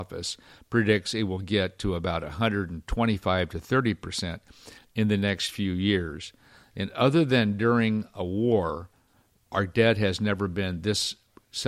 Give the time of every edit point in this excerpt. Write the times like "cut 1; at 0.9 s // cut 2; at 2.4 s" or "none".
none